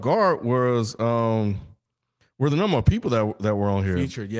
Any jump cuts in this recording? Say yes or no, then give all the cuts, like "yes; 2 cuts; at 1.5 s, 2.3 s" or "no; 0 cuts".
no; 0 cuts